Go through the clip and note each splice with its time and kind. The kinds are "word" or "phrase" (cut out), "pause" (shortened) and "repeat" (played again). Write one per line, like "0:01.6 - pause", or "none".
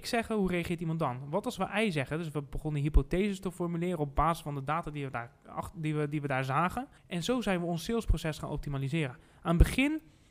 0:07.0 - pause

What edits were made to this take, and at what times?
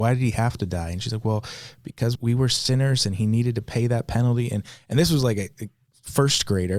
0:02.2 - word

